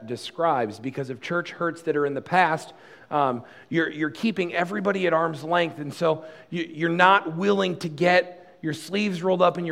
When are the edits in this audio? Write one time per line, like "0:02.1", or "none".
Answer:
none